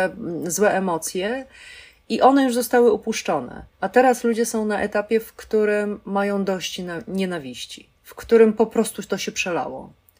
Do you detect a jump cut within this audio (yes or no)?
yes